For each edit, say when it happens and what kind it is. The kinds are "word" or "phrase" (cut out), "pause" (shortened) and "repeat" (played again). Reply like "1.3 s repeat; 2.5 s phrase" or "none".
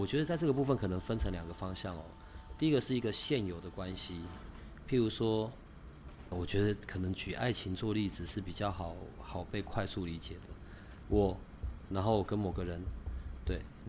6.3 s word